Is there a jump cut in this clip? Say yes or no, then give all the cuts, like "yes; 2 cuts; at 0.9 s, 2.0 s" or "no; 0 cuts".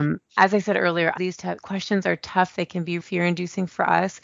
yes; 3 cuts; at 1.2 s, 1.6 s, 3.0 s